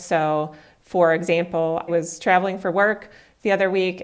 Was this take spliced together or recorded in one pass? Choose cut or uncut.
cut